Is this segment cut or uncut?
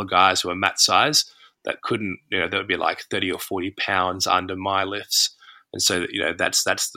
uncut